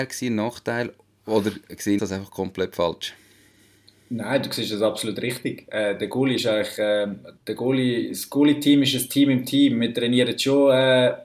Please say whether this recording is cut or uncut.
cut